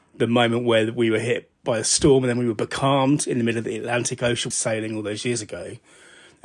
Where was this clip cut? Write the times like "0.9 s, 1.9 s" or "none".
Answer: 4.5 s

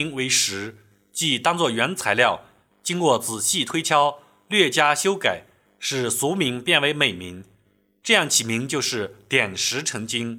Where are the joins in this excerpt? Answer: none

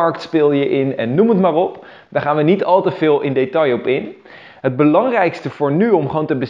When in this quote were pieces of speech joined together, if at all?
none

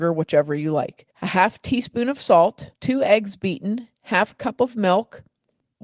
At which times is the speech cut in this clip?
1.1 s, 2.8 s, 3.9 s

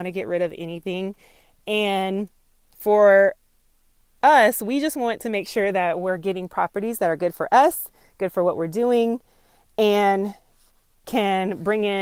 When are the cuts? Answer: none

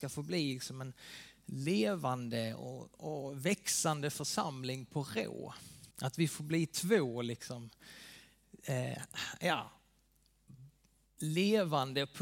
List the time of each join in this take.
5.9 s

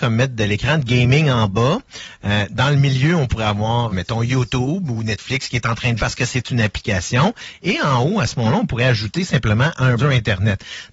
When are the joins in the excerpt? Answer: 3.9 s, 6.0 s, 10.0 s

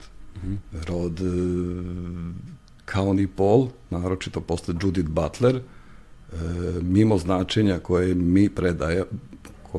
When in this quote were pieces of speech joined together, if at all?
none

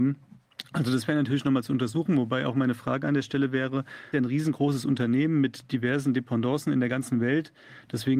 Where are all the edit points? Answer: 4.1 s

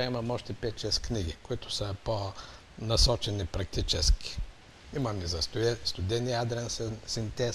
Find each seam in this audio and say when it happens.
none

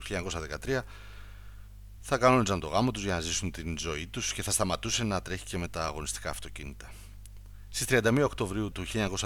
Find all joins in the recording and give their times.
none

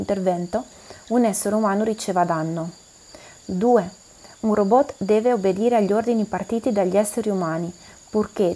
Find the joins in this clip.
none

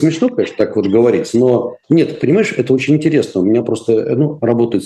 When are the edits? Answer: 1.8 s

